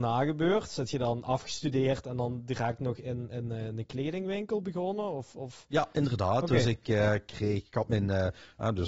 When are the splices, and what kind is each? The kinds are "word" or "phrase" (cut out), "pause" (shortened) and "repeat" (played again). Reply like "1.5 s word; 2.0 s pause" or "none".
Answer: none

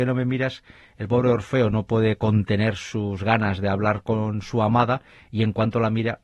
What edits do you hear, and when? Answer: none

